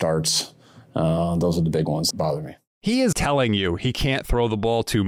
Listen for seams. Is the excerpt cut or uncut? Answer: cut